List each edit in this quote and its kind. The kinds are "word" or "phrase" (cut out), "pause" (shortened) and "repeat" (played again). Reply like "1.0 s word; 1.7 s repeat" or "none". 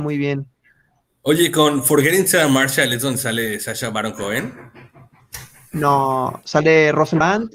none